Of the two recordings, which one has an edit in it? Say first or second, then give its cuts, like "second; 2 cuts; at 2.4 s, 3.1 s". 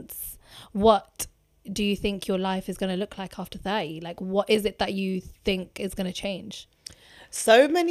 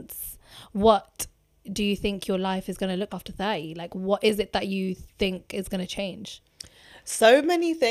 second; 1 cut; at 3.1 s